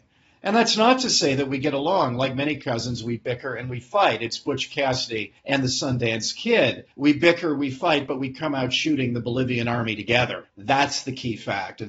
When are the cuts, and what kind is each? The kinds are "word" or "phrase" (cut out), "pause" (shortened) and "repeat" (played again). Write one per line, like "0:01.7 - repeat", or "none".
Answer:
0:05.4 - pause
0:06.9 - pause
0:10.5 - pause